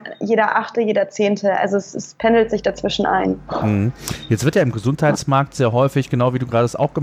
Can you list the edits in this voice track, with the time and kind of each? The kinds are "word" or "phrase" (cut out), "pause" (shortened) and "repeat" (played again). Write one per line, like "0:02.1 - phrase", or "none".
none

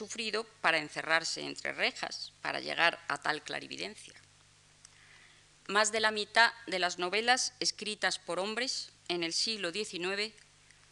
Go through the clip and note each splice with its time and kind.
0:09.0 - pause

